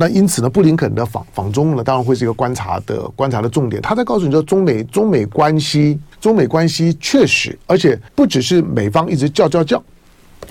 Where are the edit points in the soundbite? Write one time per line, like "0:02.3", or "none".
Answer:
0:06.1
0:07.6
0:08.1

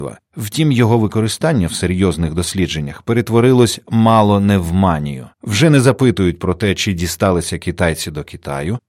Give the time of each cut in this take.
0:05.3

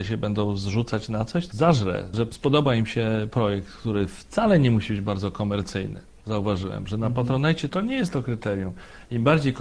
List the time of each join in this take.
0:01.5

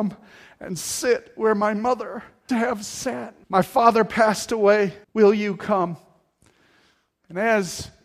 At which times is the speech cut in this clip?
0:02.5
0:03.4
0:05.0

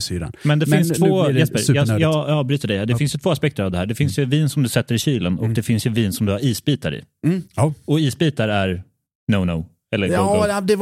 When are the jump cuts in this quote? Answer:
none

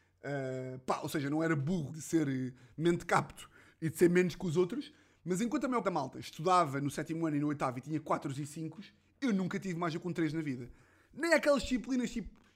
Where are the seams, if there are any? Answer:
0:01.9
0:05.8

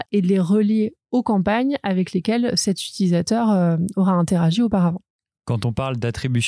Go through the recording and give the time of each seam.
none

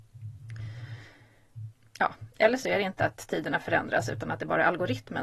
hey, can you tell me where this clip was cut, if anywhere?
none

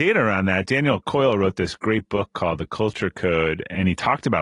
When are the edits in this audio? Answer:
none

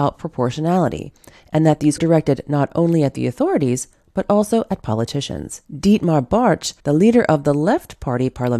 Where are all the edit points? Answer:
0:02.0
0:05.6
0:06.8

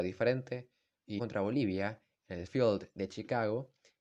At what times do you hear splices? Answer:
0:01.2
0:02.5

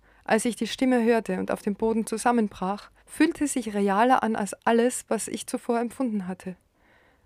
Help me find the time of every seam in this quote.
0:03.0

